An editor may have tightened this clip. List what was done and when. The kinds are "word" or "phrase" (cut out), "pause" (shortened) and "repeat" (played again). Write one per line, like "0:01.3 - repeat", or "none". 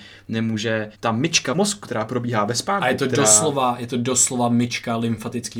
0:00.9 - pause
0:01.5 - word